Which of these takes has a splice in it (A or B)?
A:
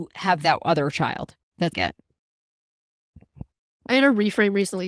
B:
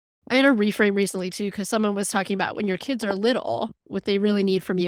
A